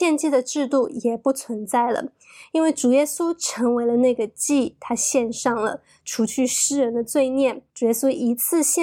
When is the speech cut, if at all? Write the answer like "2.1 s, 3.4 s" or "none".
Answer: 7.7 s

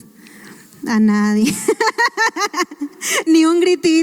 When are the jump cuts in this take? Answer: none

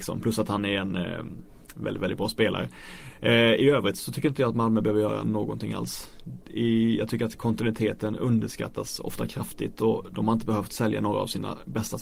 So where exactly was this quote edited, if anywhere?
none

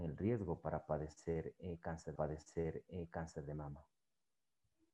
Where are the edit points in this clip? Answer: 2.2 s

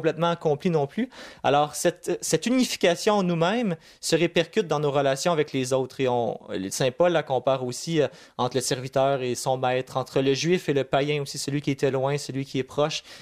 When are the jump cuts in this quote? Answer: none

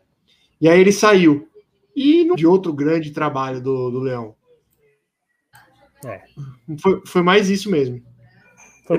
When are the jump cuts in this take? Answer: 2.3 s

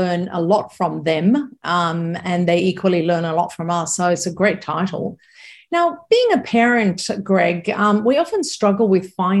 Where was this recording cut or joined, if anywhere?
none

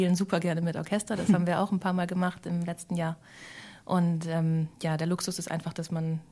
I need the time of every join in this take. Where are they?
4.7 s

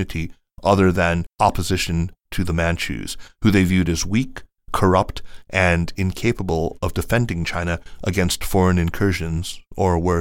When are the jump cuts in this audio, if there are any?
1.3 s

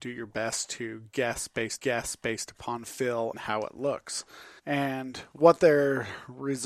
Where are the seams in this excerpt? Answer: 1.8 s, 3.3 s, 4.6 s

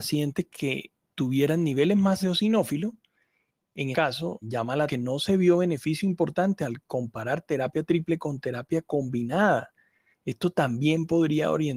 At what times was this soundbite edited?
2.2 s, 3.9 s, 4.4 s, 4.9 s

